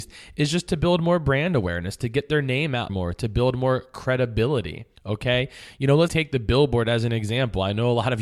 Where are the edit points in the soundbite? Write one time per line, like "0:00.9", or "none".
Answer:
0:02.9
0:05.0
0:06.1